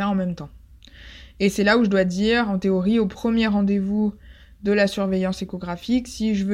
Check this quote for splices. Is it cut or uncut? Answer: uncut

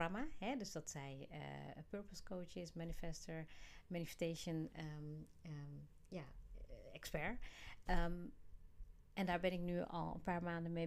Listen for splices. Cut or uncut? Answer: uncut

